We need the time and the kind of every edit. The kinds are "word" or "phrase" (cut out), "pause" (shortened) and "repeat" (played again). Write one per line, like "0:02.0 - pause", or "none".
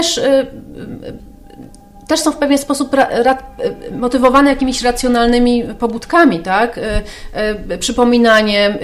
none

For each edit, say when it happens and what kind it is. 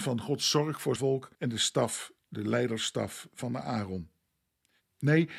0:01.0 - word
0:01.3 - pause

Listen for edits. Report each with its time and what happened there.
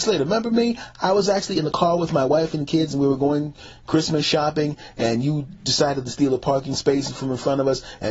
none

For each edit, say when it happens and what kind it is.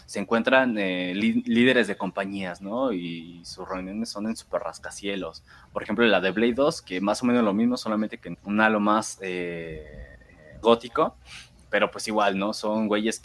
0:08.3 - word
0:10.6 - word

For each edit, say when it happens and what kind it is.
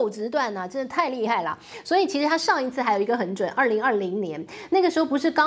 none

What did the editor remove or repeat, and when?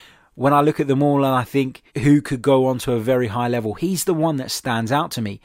0:01.9 - pause

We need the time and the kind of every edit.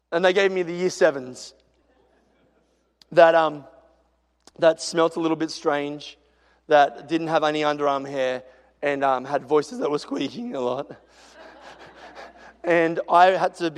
none

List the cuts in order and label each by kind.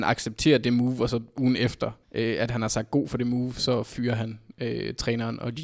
0:02.0 - pause

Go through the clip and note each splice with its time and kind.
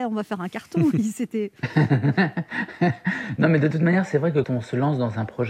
0:04.4 - word

